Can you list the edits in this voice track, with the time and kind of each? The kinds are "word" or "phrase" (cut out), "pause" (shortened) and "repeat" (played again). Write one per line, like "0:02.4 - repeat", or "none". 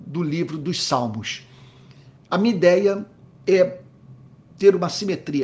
0:02.2 - pause